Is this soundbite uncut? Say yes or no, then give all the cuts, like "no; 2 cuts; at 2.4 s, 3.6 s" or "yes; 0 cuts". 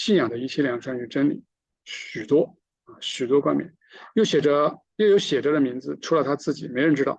no; 1 cut; at 4.9 s